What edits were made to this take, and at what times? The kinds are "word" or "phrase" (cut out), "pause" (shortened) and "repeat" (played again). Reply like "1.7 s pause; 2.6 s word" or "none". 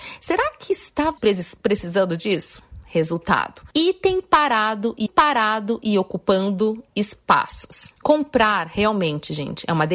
1.2 s word; 3.7 s pause; 5.1 s repeat; 8.0 s pause